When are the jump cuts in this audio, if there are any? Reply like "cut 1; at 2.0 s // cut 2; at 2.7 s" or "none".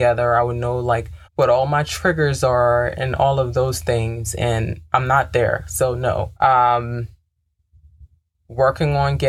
cut 1; at 1.3 s // cut 2; at 6.4 s